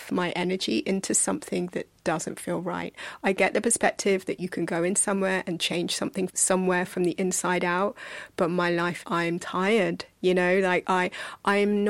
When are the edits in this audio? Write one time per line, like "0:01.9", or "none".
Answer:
0:02.0
0:06.3
0:09.0